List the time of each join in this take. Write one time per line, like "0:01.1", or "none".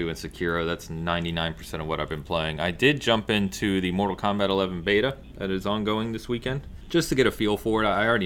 0:06.8